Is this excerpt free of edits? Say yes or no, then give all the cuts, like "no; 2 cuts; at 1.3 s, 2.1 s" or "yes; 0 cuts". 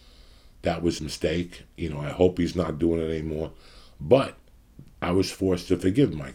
no; 2 cuts; at 1.0 s, 4.9 s